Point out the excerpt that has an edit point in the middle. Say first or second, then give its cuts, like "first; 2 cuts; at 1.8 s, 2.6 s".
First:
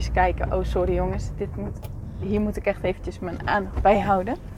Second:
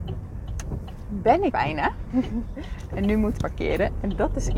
second; 2 cuts; at 1.5 s, 3.4 s